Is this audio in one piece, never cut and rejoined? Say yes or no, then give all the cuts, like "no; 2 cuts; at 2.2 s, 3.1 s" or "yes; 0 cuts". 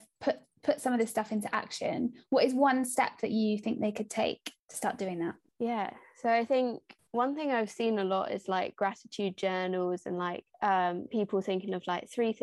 no; 4 cuts; at 4.6 s, 5.5 s, 7.0 s, 10.5 s